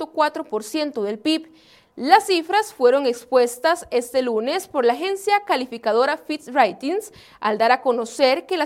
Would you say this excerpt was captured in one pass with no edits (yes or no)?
yes